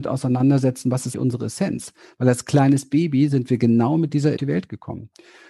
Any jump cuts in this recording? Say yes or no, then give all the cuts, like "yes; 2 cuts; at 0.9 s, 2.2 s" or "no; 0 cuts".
yes; 2 cuts; at 1.1 s, 4.4 s